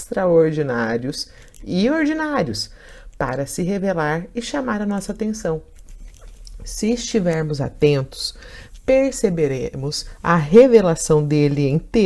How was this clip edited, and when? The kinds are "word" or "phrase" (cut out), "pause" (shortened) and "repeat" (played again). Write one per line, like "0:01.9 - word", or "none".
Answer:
none